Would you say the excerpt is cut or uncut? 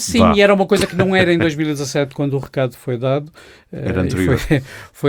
uncut